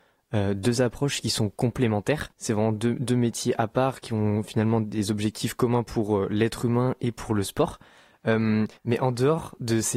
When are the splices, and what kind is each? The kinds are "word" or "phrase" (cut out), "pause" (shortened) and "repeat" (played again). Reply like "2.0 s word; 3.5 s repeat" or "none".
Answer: 2.3 s pause; 8.8 s pause

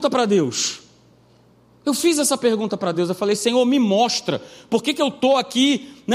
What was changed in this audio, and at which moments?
none

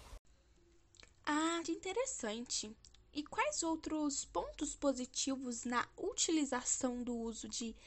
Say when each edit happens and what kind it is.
1.6 s phrase

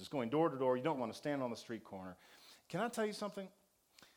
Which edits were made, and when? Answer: 1.0 s word

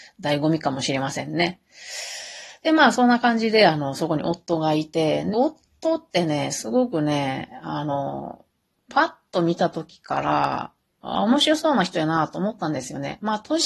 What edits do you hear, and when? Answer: 5.3 s word

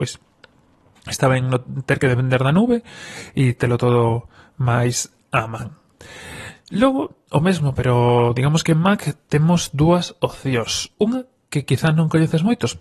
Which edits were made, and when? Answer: none

